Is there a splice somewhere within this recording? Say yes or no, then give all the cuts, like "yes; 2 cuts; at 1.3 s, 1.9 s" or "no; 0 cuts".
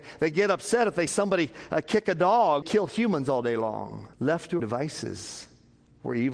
yes; 4 cuts; at 1.1 s, 2.6 s, 4.1 s, 4.6 s